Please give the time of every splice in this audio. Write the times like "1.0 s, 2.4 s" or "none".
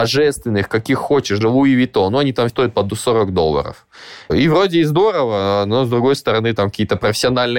1.4 s, 2.5 s